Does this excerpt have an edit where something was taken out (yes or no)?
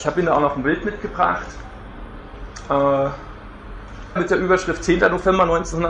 yes